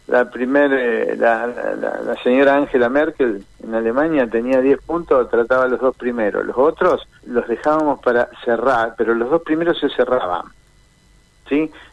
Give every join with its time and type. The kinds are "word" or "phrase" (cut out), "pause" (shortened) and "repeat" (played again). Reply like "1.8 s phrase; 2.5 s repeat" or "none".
7.2 s pause